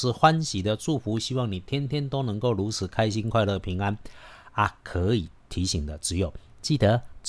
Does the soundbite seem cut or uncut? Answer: uncut